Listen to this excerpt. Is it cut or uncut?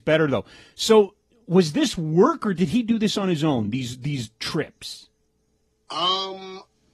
uncut